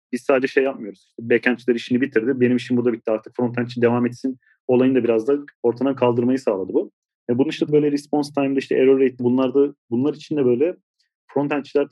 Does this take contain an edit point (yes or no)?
yes